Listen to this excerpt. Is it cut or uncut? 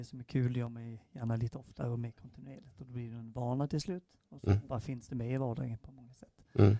uncut